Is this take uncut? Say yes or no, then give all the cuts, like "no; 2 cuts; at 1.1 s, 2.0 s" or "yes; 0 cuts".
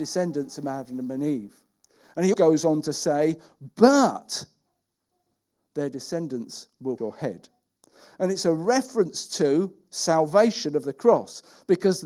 no; 2 cuts; at 2.3 s, 7.0 s